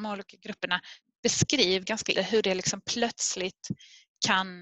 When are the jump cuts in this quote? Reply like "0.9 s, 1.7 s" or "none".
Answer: 1.8 s, 2.1 s